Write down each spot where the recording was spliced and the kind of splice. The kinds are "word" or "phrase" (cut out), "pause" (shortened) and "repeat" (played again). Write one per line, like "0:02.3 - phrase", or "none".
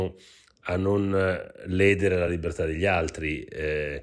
none